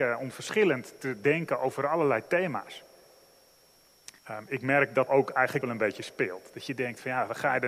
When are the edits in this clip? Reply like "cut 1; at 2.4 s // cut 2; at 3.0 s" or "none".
cut 1; at 4.2 s // cut 2; at 5.1 s // cut 3; at 5.6 s